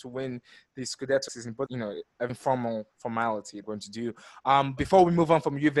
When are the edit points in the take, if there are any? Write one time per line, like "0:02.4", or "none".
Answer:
0:01.3
0:01.7
0:02.3
0:03.6
0:04.8

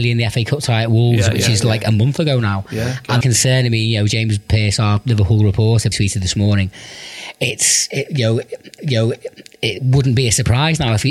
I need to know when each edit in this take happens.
0:03.2
0:05.9
0:08.8

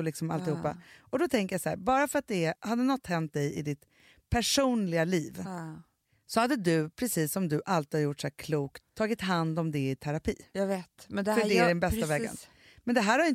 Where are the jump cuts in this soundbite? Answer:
0:08.9

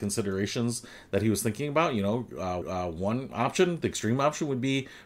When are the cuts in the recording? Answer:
0:02.6

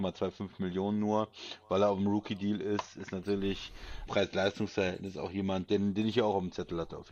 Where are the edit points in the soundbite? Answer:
0:04.1

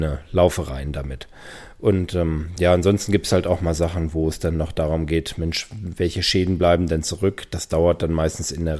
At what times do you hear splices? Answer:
none

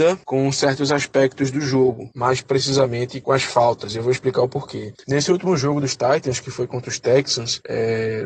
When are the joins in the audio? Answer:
0:03.2

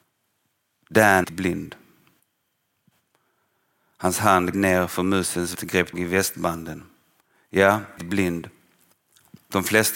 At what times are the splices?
0:01.2
0:04.5
0:05.5
0:05.9
0:08.0

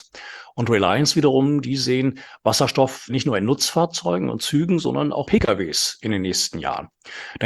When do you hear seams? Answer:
0:03.1
0:05.2

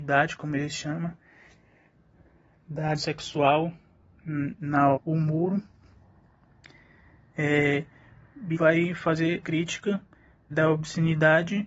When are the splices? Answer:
0:03.0
0:04.9
0:08.5
0:09.4
0:10.5

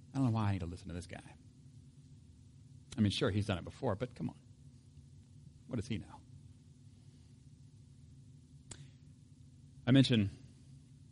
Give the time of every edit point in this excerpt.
0:05.6

